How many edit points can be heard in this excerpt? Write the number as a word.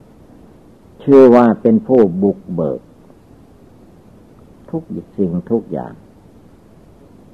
zero